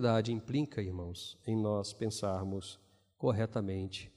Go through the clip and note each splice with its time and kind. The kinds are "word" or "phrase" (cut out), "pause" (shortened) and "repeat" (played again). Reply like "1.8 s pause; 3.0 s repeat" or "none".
none